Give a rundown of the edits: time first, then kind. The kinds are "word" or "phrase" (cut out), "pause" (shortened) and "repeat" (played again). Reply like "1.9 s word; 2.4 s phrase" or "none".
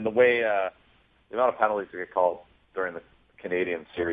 none